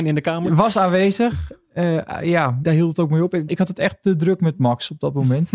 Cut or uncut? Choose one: cut